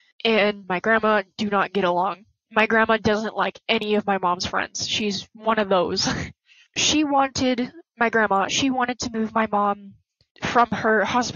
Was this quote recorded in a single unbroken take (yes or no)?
yes